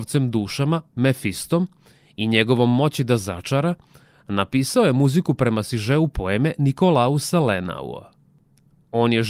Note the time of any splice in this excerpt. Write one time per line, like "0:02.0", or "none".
none